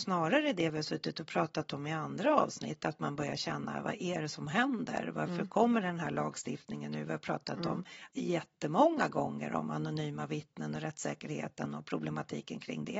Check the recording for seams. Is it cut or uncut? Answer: cut